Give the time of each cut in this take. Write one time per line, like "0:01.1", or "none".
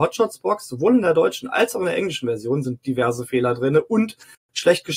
none